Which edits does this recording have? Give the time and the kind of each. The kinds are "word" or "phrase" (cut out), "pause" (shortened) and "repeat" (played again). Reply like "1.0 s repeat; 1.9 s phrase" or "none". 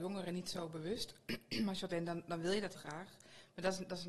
1.9 s word; 2.7 s word